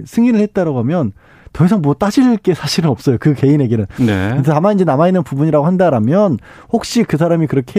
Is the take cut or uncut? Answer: uncut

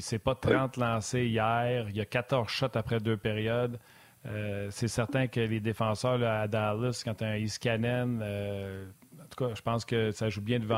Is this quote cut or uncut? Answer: uncut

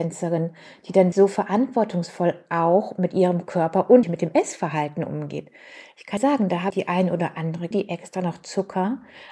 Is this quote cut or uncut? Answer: cut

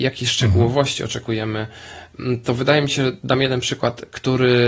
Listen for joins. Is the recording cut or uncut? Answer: uncut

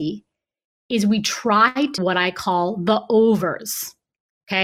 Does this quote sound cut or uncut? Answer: cut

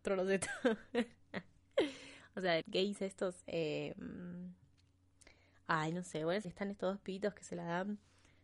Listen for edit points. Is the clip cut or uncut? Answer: cut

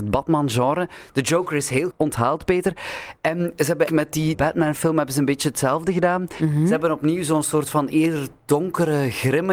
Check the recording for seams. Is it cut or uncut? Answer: cut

